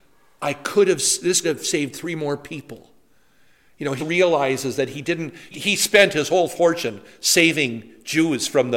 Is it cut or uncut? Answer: cut